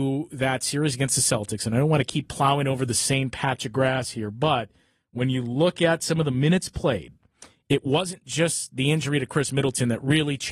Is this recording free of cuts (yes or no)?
yes